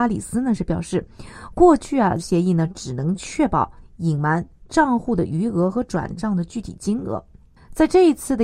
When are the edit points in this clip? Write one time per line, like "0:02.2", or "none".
0:02.2